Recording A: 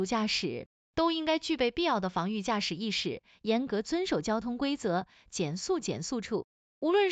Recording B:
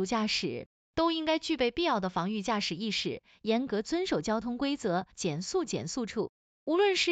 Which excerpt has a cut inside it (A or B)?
B